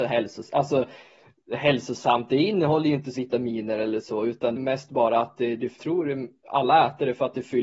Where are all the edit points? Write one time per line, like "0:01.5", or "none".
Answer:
0:03.2
0:04.6
0:05.8